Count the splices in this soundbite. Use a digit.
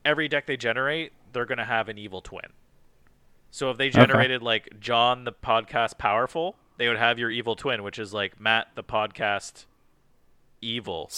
0